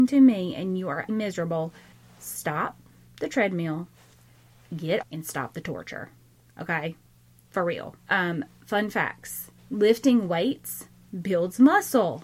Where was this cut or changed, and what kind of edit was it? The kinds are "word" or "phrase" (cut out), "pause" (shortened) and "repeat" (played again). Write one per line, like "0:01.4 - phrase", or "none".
0:01.1 - word
0:01.9 - pause
0:05.0 - word
0:08.0 - pause
0:09.6 - pause